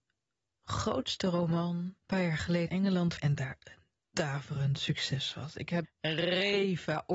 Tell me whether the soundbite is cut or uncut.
cut